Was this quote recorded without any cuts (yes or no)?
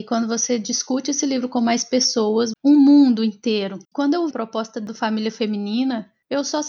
no